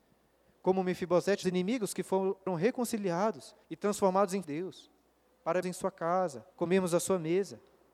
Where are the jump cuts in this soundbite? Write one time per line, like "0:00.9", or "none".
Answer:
0:01.4
0:02.5
0:03.6
0:04.4
0:05.6
0:06.5